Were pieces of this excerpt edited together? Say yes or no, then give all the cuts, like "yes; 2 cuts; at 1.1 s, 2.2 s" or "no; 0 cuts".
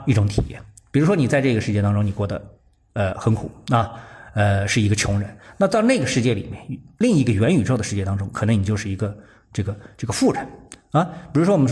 no; 0 cuts